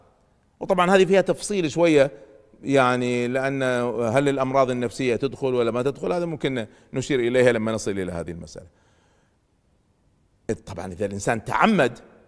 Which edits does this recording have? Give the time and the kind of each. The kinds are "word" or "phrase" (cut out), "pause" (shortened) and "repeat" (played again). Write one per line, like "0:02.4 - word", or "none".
none